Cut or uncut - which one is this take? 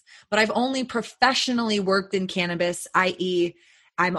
uncut